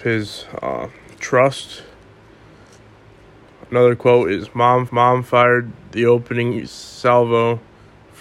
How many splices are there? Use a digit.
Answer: 1